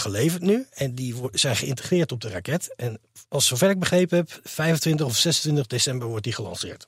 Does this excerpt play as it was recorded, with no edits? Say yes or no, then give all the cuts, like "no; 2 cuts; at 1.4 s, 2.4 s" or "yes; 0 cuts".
yes; 0 cuts